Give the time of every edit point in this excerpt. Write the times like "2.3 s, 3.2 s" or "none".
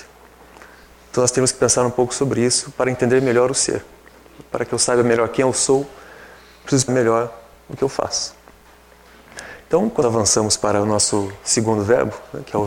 6.9 s, 10.0 s